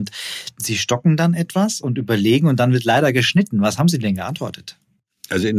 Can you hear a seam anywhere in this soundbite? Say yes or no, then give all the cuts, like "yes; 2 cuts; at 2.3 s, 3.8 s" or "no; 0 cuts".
no; 0 cuts